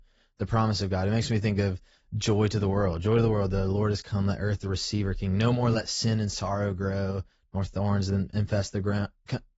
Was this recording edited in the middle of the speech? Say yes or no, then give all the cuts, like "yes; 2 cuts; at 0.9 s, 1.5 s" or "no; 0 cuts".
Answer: no; 0 cuts